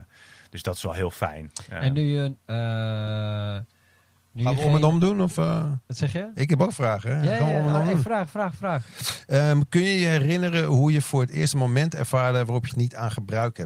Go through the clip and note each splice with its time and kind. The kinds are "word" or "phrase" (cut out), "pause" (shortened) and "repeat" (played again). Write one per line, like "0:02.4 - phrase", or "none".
0:12.7 - phrase